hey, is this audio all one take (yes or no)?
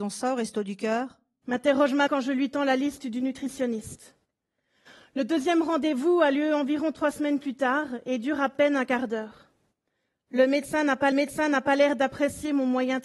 no